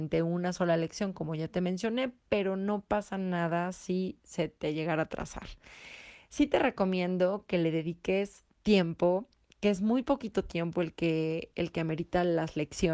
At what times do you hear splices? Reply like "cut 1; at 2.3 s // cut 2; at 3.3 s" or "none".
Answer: cut 1; at 8.5 s